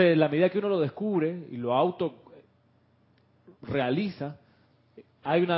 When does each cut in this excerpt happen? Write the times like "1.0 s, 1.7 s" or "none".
3.6 s